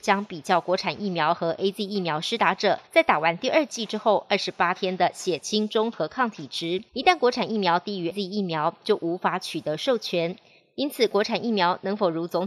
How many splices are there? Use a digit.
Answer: 3